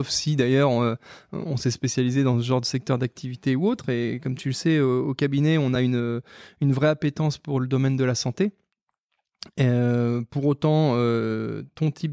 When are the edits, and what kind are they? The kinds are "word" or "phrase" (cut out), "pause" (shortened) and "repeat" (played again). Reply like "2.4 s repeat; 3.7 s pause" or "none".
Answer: none